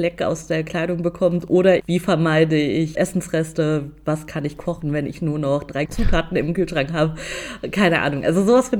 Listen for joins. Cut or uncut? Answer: cut